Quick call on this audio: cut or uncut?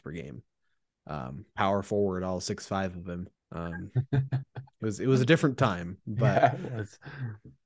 cut